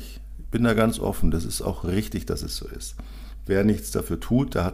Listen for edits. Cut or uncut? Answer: uncut